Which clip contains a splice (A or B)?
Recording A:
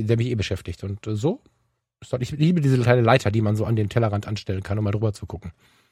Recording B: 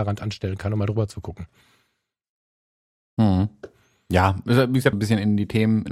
B